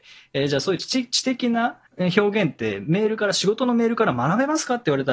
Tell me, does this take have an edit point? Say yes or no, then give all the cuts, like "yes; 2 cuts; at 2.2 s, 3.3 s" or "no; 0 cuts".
yes; 1 cut; at 1.9 s